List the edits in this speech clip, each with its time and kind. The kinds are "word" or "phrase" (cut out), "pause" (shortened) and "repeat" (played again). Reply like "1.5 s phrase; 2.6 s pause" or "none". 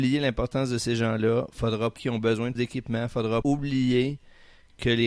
2.0 s word; 2.6 s word; 3.4 s word